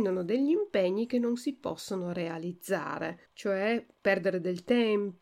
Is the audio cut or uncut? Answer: cut